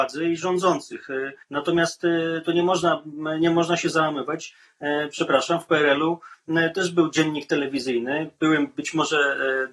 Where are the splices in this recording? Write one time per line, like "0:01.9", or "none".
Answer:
0:01.4